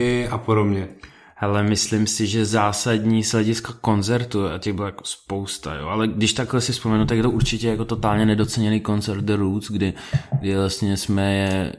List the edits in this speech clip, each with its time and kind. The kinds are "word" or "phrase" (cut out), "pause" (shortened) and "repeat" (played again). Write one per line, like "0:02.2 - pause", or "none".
none